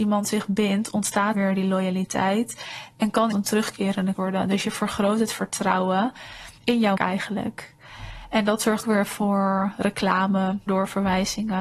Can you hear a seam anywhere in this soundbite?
yes; 7 cuts; at 1.3 s, 3.3 s, 4.1 s, 6.6 s, 7.0 s, 8.8 s, 10.7 s

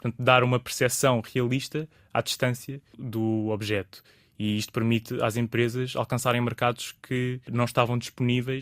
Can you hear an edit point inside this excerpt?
no; 0 cuts

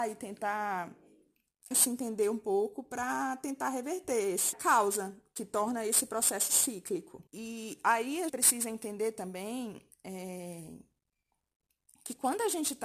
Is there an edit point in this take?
yes; 4 cuts; at 1.7 s, 4.5 s, 7.3 s, 8.3 s

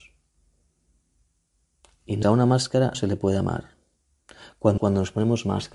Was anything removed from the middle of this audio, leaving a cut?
yes; 3 cuts; at 2.2 s, 2.9 s, 4.8 s

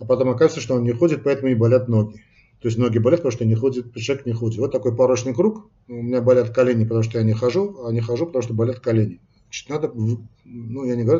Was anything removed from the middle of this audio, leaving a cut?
no; 0 cuts

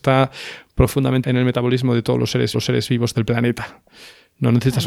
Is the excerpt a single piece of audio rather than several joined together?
no; 2 cuts; at 1.2 s, 2.5 s

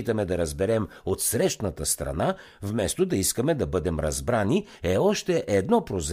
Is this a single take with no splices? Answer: yes; 0 cuts

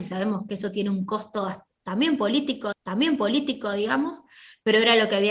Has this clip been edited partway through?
yes; 1 cut; at 2.7 s

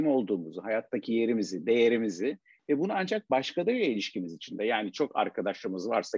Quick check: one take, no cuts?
yes; 0 cuts

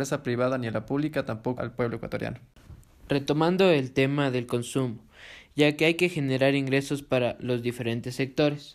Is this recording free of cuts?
no; 1 cut; at 1.6 s

